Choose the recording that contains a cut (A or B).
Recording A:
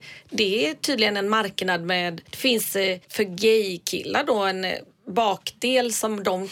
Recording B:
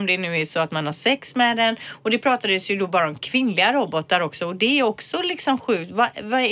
A